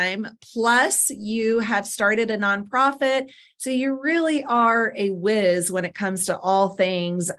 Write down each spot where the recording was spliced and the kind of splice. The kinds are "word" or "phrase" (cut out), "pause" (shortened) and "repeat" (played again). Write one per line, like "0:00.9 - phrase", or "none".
none

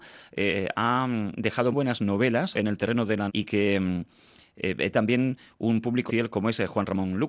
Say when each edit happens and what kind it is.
0:01.7 - word
0:02.5 - word
0:03.3 - word
0:04.9 - word
0:06.1 - word

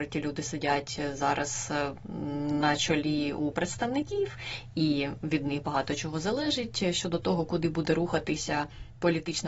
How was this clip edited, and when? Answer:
0:03.5 - word

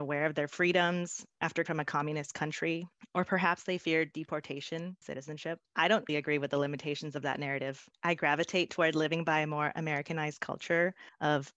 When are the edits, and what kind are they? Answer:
0:01.7 - word
0:05.0 - phrase
0:06.1 - word

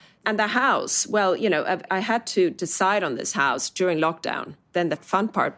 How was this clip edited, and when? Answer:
none

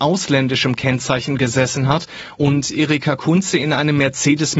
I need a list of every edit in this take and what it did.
none

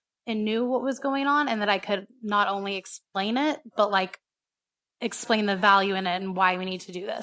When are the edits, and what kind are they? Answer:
none

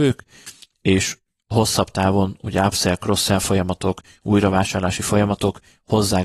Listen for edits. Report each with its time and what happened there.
none

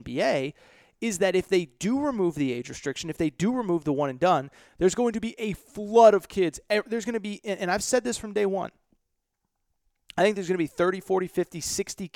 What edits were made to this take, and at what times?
none

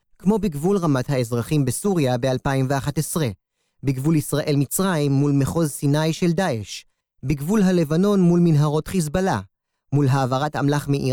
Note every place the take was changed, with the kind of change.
0:01.0 - phrase

